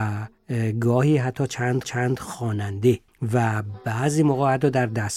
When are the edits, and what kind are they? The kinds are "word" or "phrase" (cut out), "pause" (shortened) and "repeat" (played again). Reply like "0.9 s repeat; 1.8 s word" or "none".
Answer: 1.8 s repeat